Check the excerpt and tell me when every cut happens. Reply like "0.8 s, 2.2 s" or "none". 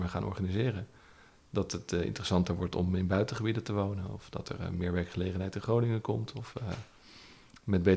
none